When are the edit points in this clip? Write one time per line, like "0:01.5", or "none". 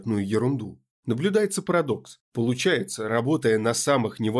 0:00.9